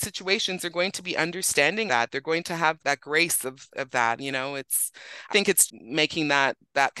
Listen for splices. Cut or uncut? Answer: cut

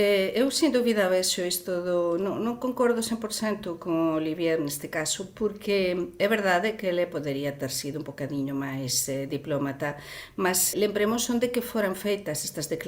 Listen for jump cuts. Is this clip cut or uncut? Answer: cut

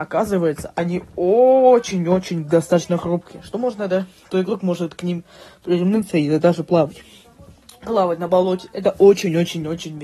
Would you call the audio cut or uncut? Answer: uncut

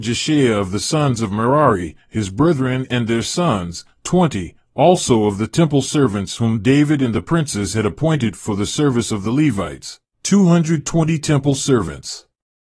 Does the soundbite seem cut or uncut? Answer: uncut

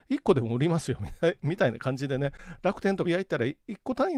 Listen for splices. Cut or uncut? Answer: cut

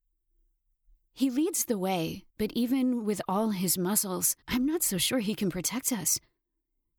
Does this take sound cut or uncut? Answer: cut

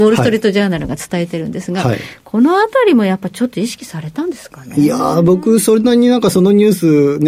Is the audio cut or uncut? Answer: uncut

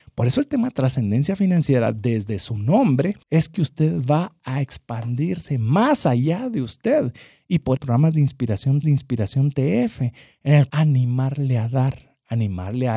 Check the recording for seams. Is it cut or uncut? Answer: cut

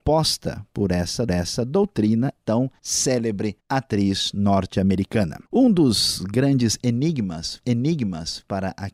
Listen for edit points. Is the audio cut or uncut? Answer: cut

